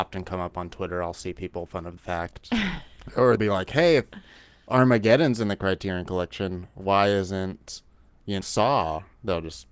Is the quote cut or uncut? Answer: cut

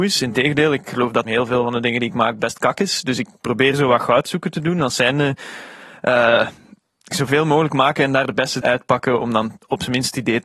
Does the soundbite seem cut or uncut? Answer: cut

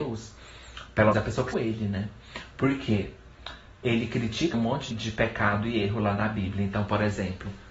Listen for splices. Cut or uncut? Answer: cut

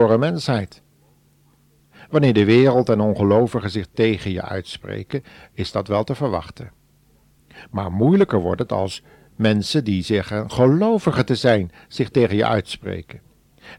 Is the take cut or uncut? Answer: uncut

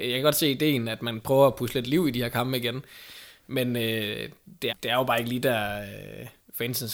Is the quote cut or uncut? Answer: cut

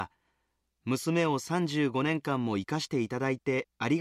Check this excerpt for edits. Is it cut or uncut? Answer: uncut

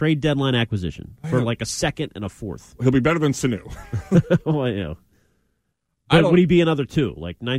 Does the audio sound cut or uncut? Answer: uncut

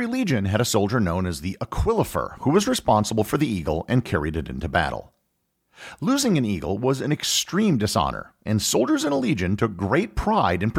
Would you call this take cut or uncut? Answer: uncut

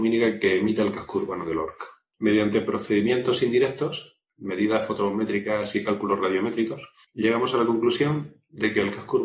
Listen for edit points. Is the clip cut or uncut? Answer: uncut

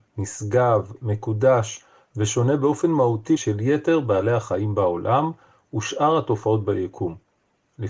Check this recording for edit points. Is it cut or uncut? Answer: cut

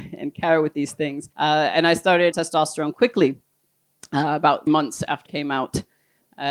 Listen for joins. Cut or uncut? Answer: cut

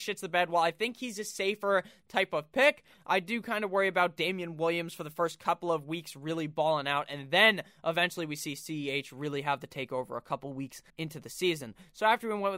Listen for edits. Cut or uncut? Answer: cut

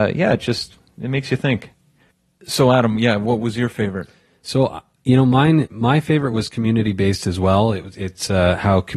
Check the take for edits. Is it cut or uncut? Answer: uncut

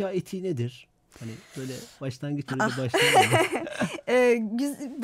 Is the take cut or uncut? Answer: cut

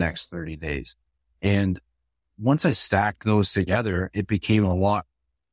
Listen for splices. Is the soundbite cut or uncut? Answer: uncut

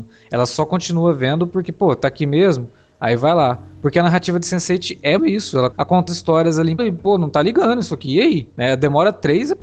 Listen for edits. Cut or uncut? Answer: cut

